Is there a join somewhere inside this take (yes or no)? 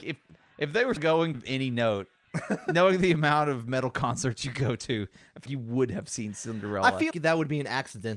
yes